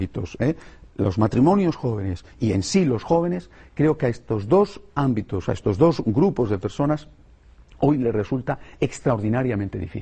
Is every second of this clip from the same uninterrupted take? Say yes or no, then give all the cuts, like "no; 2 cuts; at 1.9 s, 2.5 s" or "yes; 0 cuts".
yes; 0 cuts